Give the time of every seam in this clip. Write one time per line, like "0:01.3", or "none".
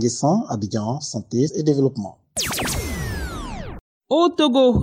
0:01.5